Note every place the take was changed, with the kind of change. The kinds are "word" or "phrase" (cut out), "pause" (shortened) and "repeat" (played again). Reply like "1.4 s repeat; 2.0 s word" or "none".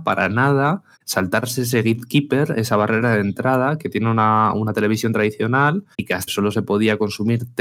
0.9 s pause; 5.9 s pause; 6.3 s word